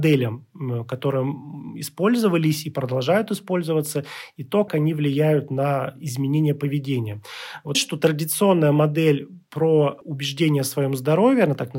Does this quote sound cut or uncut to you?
cut